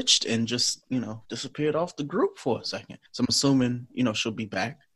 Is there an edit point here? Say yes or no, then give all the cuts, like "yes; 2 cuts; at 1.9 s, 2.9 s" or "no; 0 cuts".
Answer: yes; 2 cuts; at 1.2 s, 3.1 s